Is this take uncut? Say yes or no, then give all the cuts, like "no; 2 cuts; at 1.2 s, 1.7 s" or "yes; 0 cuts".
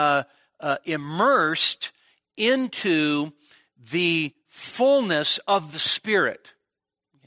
yes; 0 cuts